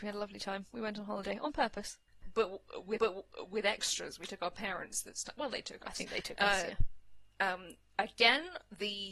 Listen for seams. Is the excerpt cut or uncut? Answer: cut